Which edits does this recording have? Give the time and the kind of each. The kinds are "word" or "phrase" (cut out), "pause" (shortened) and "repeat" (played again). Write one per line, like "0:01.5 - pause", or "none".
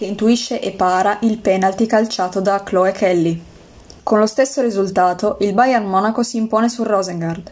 0:04.0 - pause